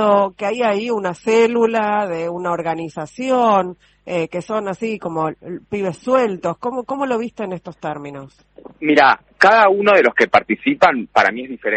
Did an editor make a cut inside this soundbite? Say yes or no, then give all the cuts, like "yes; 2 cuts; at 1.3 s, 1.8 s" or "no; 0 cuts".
no; 0 cuts